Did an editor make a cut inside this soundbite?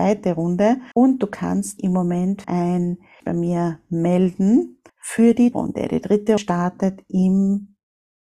yes; 7 cuts; at 0.9 s, 1.8 s, 2.4 s, 3.2 s, 4.9 s, 5.5 s, 6.4 s

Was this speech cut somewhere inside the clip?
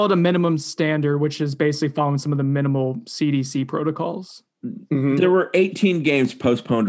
no; 0 cuts

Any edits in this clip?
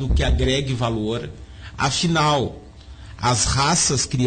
no; 0 cuts

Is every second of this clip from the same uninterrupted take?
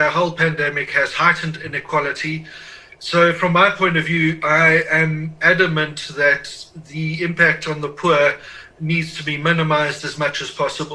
yes; 0 cuts

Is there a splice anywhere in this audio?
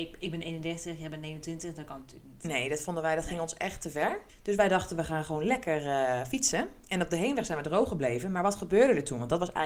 no; 0 cuts

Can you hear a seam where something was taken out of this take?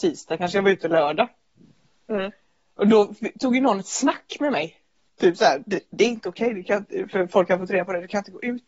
no; 0 cuts

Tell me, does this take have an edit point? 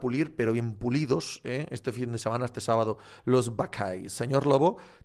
no; 0 cuts

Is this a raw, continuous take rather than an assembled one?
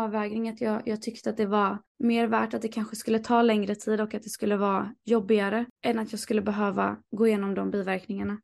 no; 1 cut; at 7.0 s

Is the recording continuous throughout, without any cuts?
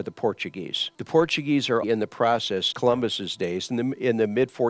no; 3 cuts; at 0.9 s, 1.8 s, 2.7 s

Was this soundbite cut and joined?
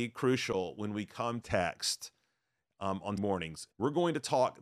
yes; 3 cuts; at 1.4 s, 3.2 s, 3.7 s

